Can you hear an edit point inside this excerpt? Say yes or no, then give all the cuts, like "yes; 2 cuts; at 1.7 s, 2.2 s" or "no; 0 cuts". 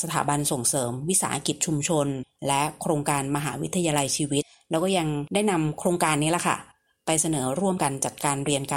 no; 0 cuts